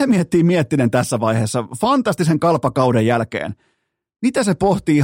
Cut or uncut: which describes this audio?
uncut